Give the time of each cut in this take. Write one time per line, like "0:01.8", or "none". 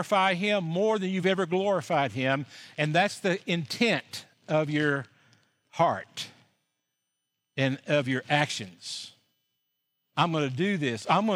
none